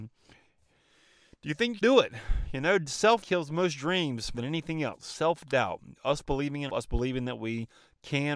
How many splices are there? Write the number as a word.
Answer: four